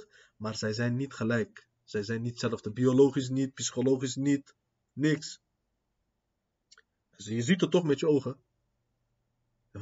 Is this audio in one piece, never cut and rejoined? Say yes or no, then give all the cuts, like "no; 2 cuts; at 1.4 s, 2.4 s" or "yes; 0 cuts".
yes; 0 cuts